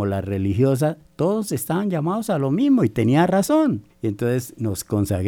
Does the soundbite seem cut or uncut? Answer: cut